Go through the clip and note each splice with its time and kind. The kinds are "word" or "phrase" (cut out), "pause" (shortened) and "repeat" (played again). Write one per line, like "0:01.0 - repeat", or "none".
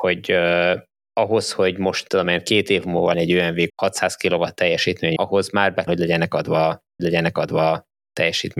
0:02.1 - word
0:03.1 - word
0:03.7 - word
0:05.2 - word
0:05.9 - word
0:07.0 - repeat